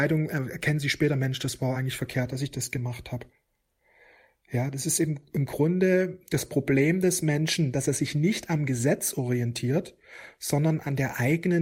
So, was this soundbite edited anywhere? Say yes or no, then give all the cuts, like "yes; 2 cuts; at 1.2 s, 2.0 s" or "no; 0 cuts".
no; 0 cuts